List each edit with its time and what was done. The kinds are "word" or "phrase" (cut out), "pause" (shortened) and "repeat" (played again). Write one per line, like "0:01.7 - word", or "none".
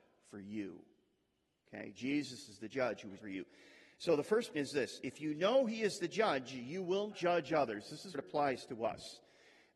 0:03.2 - word
0:04.5 - word
0:07.1 - word
0:08.1 - word